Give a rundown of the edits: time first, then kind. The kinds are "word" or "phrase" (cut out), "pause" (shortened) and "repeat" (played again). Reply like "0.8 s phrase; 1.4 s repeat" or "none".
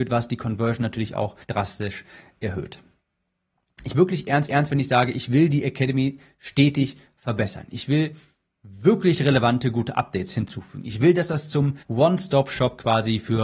1.4 s pause; 3.9 s phrase; 4.5 s repeat; 8.5 s pause; 11.8 s pause